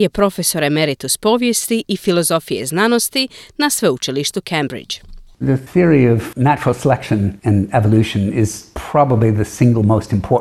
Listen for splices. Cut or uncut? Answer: uncut